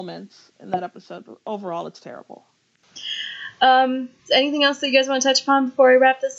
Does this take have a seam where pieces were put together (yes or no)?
yes